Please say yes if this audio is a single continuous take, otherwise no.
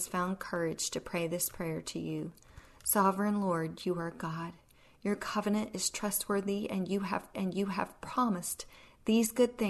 no